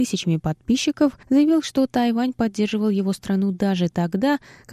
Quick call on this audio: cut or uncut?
uncut